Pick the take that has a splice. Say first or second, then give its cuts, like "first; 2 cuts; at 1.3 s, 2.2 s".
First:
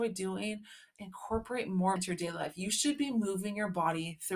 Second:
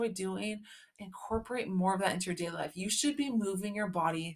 first; 1 cut; at 2.0 s